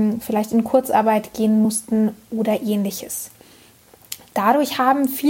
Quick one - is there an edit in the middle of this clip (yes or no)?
no